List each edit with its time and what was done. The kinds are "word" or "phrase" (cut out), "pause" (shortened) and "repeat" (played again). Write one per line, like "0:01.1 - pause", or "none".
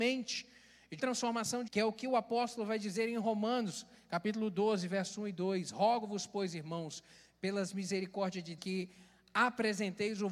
0:01.0 - word
0:01.7 - word
0:08.6 - word